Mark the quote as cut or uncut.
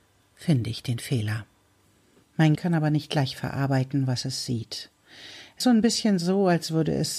cut